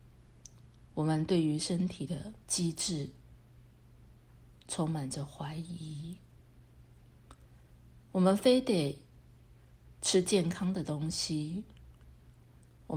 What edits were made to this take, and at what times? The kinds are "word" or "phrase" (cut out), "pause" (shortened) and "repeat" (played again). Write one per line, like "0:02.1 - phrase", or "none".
0:02.4 - pause
0:04.6 - pause